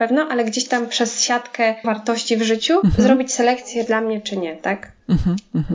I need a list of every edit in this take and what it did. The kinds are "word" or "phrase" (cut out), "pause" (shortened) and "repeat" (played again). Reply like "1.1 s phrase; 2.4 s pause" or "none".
1.8 s word; 2.8 s word; 3.9 s phrase